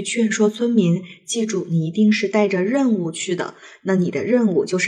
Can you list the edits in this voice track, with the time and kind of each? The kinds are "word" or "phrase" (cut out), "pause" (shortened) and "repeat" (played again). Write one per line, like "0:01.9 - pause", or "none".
none

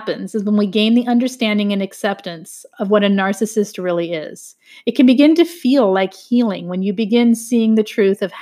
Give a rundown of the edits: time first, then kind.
none

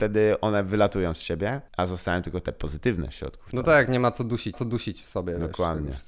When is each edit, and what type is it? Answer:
0:01.7 - pause
0:04.5 - repeat

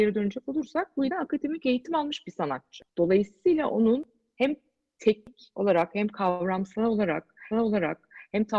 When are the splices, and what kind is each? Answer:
0:01.1 - word
0:02.9 - pause
0:07.5 - repeat

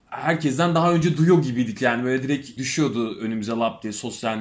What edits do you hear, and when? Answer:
0:02.6 - word

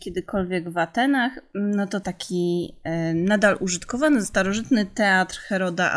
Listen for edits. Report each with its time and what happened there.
0:02.0 - phrase
0:04.2 - word

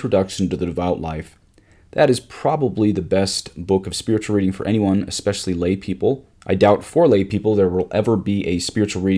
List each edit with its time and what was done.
0:06.3 - pause

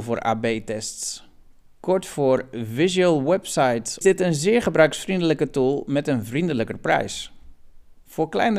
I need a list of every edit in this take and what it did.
0:04.0 - phrase

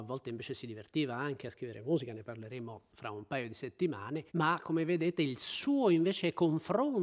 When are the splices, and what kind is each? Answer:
0:04.3 - pause

